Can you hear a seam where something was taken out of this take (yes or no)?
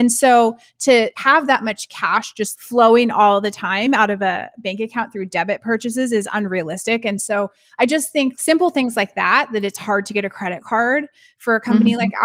no